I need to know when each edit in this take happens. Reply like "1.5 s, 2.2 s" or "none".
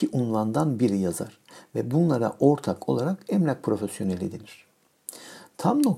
none

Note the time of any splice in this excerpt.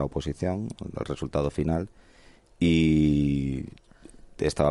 none

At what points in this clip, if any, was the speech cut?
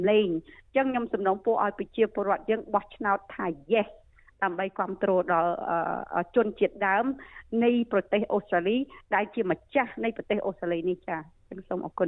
none

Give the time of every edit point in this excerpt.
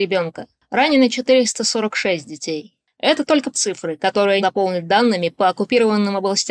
3.5 s, 4.4 s

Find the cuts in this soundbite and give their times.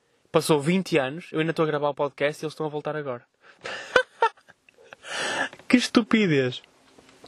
none

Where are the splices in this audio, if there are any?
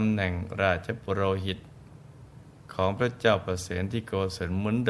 none

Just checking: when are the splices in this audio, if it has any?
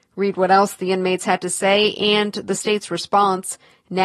none

